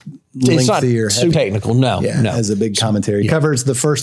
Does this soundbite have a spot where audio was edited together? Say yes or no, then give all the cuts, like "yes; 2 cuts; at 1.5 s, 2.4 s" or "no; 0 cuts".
yes; 1 cut; at 1.3 s